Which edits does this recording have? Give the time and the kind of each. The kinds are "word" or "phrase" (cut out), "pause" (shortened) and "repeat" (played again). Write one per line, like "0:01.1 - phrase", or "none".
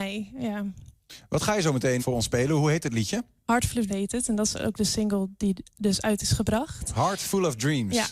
0:02.0 - word
0:03.9 - word